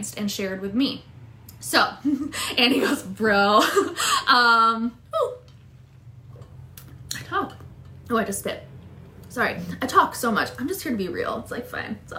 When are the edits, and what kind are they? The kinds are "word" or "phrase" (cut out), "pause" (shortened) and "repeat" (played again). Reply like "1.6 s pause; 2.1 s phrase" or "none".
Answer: none